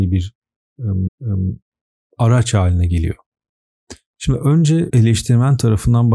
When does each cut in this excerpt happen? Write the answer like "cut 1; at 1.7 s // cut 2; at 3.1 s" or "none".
cut 1; at 1.1 s // cut 2; at 4.9 s